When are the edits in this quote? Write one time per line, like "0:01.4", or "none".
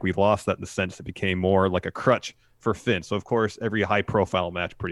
none